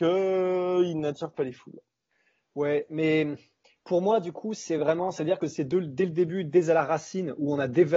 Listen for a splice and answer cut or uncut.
uncut